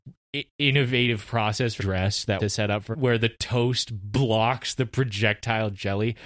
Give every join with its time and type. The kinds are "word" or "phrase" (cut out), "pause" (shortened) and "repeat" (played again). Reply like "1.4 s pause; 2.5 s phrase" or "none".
1.8 s word; 2.4 s word; 2.9 s word